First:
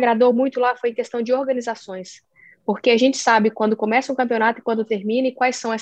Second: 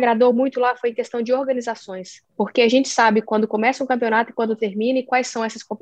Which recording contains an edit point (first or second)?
second